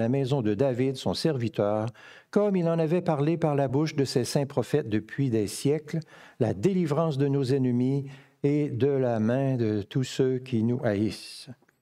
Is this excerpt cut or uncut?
uncut